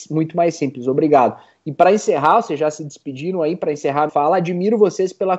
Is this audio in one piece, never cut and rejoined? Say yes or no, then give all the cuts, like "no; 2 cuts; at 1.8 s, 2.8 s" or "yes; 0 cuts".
no; 1 cut; at 4.1 s